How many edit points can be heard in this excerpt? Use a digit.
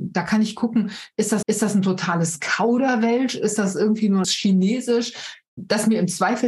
2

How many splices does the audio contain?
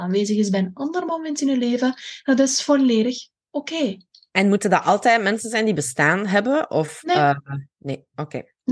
0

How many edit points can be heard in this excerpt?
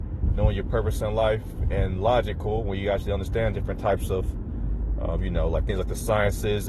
0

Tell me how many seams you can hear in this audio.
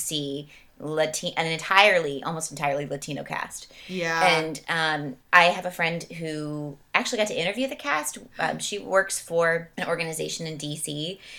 2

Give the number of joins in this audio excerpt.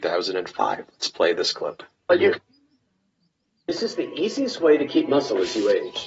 0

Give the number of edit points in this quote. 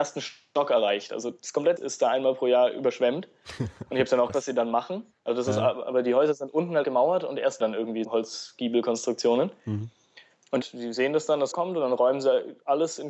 8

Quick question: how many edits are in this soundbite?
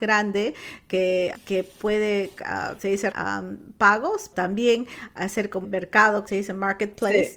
6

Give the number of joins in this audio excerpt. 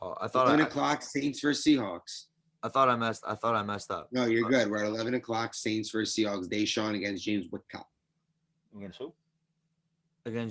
0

